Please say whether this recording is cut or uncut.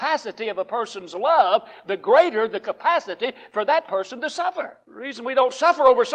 cut